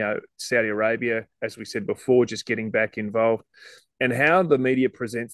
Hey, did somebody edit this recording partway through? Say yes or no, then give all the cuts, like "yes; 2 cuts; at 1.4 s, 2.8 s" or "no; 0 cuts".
no; 0 cuts